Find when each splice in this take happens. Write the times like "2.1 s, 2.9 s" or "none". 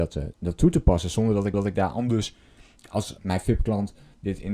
1.5 s, 3.2 s

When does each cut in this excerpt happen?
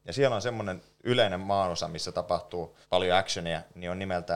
2.8 s

